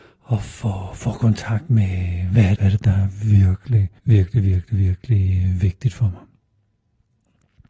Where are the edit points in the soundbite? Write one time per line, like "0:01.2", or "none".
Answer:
0:02.6
0:04.0